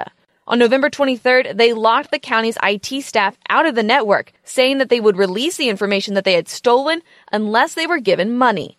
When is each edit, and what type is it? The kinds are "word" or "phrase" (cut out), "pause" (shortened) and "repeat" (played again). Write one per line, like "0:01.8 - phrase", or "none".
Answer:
none